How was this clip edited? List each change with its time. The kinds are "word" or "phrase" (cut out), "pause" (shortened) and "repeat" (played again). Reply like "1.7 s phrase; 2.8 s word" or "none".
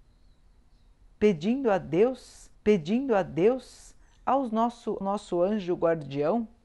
2.5 s repeat; 5.0 s word